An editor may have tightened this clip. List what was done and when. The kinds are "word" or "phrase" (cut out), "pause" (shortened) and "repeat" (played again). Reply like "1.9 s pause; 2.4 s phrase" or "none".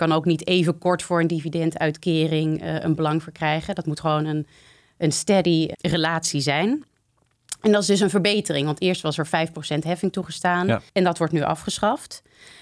5.7 s word; 10.9 s pause